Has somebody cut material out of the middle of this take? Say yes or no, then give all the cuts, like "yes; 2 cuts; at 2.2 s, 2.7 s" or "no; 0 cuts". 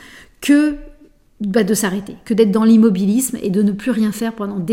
no; 0 cuts